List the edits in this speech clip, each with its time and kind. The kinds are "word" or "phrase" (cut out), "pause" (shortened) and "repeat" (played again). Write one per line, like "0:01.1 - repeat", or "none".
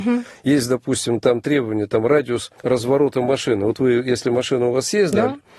0:02.6 - pause